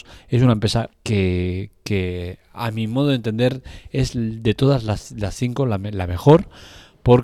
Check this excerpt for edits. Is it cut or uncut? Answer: cut